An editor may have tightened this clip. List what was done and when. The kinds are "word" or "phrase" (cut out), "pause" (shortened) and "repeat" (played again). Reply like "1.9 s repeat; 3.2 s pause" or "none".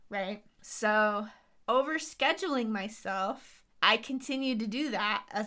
1.5 s pause; 3.7 s pause